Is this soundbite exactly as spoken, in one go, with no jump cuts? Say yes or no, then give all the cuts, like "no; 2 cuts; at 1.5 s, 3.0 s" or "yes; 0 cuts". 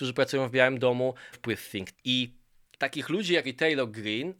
no; 4 cuts; at 1.3 s, 1.9 s, 2.7 s, 3.4 s